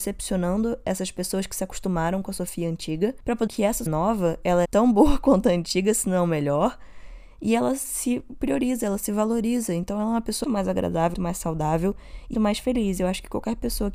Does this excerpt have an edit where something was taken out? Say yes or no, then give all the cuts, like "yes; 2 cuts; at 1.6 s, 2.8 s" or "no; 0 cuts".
yes; 6 cuts; at 3.5 s, 3.9 s, 4.6 s, 10.4 s, 11.1 s, 12.3 s